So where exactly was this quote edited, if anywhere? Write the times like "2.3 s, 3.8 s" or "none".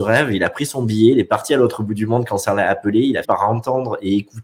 3.2 s